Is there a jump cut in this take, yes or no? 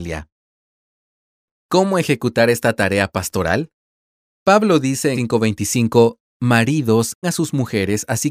yes